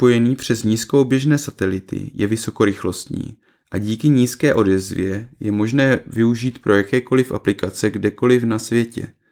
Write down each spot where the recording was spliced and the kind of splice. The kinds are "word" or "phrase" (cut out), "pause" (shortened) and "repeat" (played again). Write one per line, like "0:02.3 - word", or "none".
none